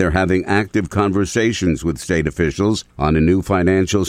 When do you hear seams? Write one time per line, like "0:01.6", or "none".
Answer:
0:02.9